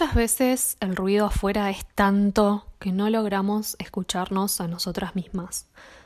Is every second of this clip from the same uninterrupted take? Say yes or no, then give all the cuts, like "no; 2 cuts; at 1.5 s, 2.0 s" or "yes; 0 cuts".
yes; 0 cuts